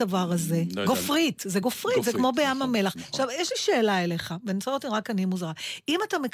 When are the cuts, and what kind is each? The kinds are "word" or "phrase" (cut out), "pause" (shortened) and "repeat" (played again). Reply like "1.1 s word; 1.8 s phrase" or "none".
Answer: none